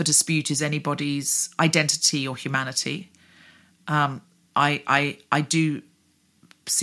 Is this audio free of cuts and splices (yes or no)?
yes